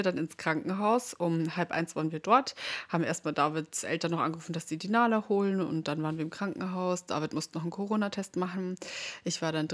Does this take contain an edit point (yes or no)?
no